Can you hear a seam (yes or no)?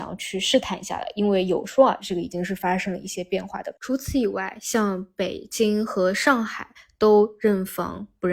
yes